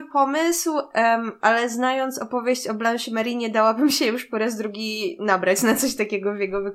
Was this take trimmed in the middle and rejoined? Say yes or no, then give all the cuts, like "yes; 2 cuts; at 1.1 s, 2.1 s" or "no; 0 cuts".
no; 0 cuts